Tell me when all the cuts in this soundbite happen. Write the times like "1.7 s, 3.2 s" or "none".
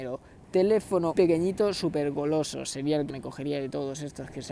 1.1 s, 3.1 s